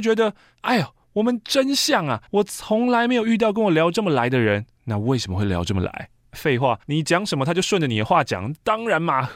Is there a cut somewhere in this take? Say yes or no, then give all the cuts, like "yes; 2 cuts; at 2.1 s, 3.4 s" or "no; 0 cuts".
yes; 4 cuts; at 1.0 s, 2.3 s, 4.7 s, 6.8 s